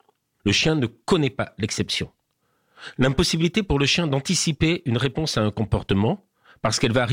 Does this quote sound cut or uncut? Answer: uncut